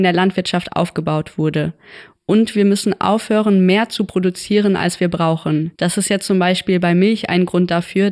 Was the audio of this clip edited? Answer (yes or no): yes